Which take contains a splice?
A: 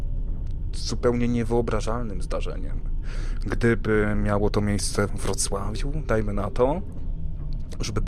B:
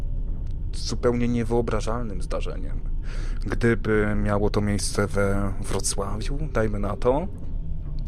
A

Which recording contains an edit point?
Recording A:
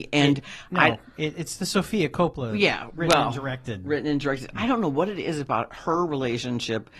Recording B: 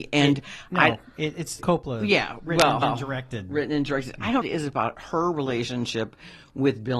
B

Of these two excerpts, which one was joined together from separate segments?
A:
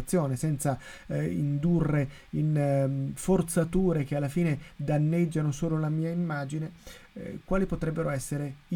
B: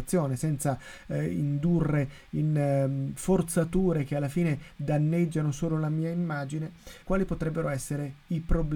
B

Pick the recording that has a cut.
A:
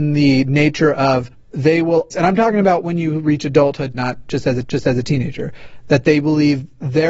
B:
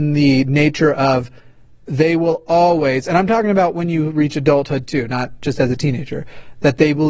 A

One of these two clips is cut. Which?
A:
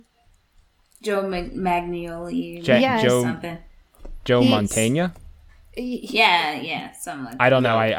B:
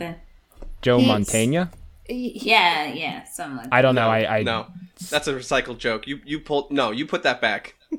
B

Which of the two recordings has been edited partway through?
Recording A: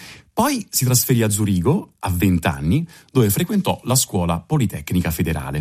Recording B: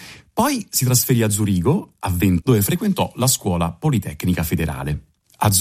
B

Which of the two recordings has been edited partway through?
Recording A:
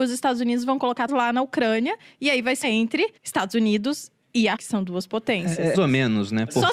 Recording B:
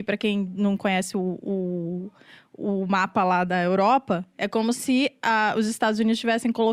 A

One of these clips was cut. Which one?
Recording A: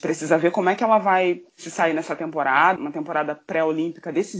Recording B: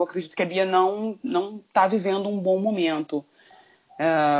A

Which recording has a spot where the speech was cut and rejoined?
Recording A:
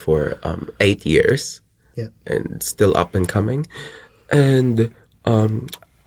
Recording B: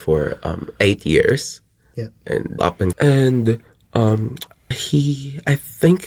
B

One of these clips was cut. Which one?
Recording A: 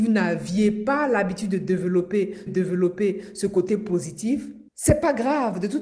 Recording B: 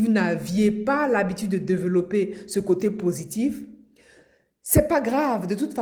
A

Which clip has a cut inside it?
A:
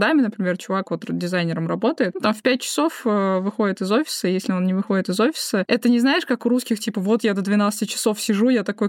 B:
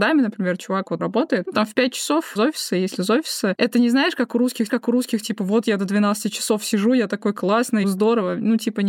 B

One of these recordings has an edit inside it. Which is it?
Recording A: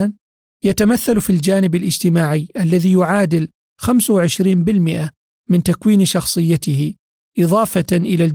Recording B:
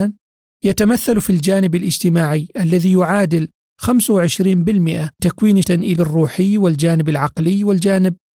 B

